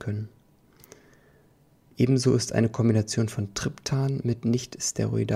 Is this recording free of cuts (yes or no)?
yes